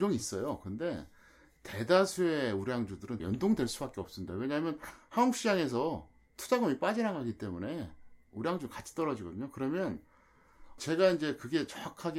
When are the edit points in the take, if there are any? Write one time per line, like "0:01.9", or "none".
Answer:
0:03.2
0:10.8